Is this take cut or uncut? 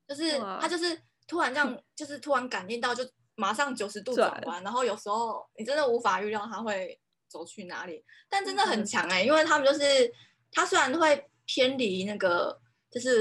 uncut